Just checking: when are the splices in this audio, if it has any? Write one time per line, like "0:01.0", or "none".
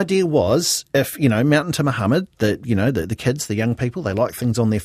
none